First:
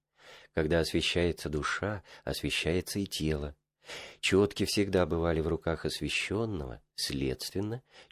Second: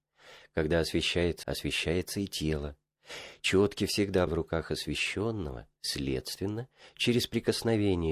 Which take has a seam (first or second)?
second